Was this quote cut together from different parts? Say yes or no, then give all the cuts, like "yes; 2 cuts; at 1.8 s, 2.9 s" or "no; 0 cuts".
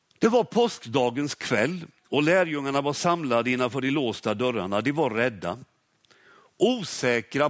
no; 0 cuts